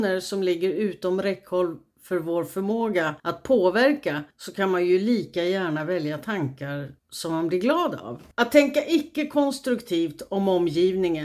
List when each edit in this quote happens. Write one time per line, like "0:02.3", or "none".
0:03.2
0:04.3
0:07.0
0:08.3